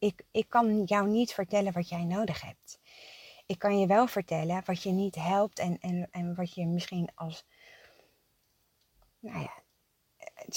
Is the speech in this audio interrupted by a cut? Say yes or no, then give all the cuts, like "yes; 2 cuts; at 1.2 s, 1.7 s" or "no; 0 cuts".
no; 0 cuts